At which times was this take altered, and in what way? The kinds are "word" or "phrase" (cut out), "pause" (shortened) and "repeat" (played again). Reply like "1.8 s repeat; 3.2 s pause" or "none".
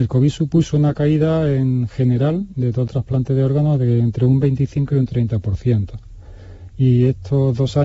2.9 s word